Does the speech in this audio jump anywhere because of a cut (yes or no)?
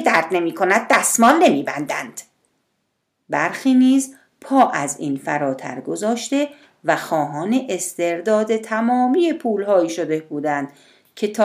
no